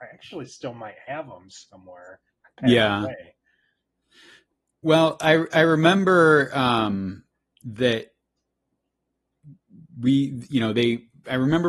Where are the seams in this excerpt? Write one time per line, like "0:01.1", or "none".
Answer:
none